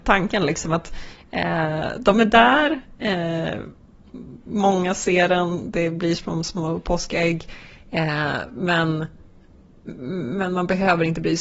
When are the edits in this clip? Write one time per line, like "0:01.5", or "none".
none